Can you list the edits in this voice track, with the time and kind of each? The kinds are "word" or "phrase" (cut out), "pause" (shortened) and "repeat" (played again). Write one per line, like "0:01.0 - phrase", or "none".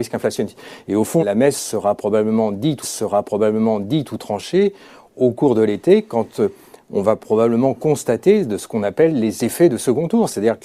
0:01.2 - word
0:02.8 - repeat